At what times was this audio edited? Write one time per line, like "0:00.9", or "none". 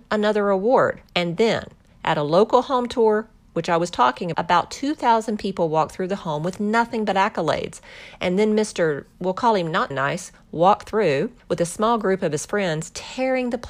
0:01.1
0:04.3
0:09.9
0:11.4